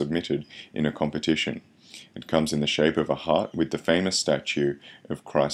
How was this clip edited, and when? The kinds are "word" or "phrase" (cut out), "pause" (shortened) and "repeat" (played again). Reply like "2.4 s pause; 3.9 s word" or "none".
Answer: none